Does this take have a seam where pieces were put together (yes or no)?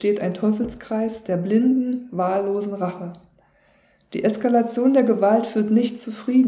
no